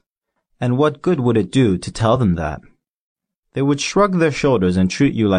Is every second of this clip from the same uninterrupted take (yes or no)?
yes